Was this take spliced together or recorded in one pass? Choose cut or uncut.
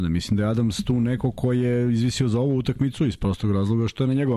uncut